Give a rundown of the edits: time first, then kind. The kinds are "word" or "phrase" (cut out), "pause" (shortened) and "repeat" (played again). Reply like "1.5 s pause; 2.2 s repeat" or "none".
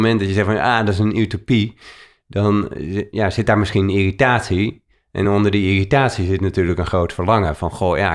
none